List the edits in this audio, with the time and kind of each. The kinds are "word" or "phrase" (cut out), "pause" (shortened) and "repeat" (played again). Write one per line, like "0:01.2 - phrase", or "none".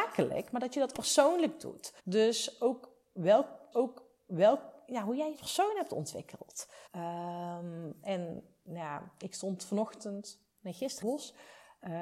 0:00.9 - word
0:02.0 - pause
0:03.7 - repeat
0:05.3 - phrase
0:06.9 - pause
0:11.0 - phrase